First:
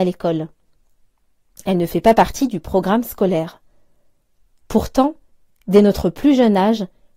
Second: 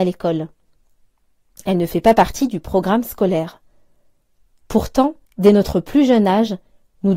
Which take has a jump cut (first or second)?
second